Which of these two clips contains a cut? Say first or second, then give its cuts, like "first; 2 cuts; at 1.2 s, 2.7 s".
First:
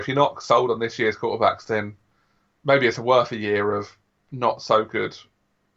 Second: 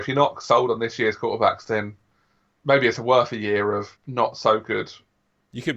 second; 1 cut; at 4.0 s